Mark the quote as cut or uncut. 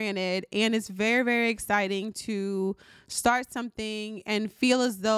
uncut